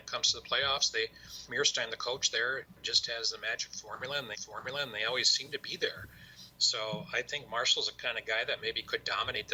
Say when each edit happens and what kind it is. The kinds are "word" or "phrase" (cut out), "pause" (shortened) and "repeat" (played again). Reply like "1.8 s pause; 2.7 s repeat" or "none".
1.5 s word; 4.3 s repeat